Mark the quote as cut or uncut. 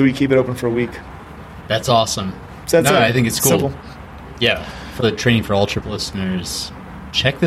cut